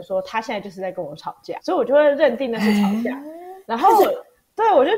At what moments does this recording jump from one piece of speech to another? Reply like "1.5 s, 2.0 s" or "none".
1.6 s, 3.6 s